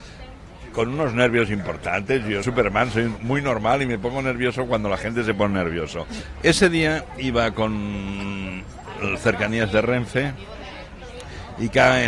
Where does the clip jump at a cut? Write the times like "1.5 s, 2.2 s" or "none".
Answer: 2.4 s, 3.2 s

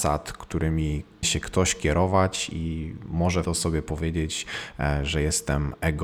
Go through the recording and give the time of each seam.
1.2 s, 3.4 s

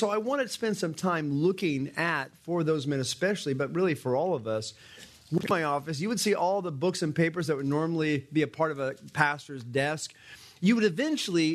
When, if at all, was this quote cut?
none

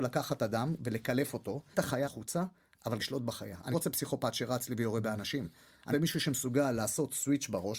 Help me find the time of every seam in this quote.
1.7 s, 2.0 s, 3.0 s, 3.7 s, 5.9 s

